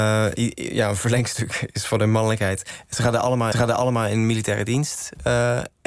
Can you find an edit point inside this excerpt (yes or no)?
yes